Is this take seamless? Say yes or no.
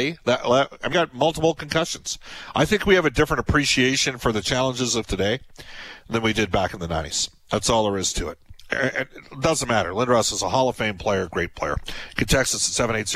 no